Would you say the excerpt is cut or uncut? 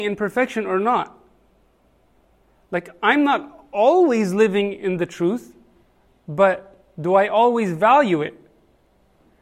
uncut